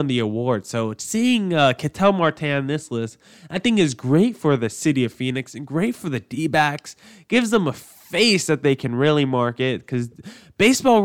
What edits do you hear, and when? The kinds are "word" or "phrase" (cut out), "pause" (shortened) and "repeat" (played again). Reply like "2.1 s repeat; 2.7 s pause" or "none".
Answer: none